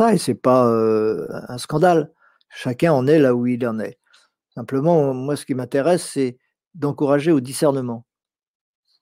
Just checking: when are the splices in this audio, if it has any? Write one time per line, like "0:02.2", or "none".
none